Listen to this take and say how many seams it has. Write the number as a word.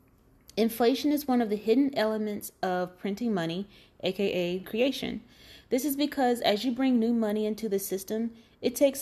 one